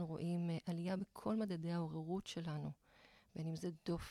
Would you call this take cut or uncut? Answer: uncut